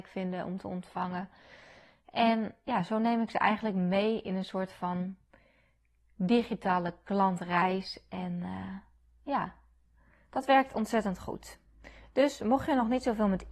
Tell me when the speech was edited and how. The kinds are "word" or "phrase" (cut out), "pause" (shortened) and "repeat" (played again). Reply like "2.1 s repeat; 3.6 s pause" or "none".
none